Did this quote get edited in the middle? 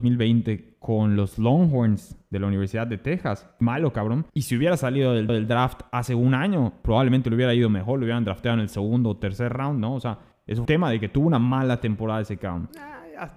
yes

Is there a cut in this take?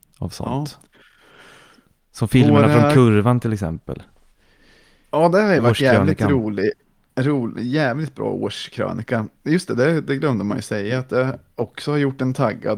no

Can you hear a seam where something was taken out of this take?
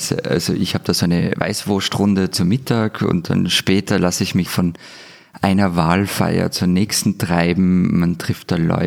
yes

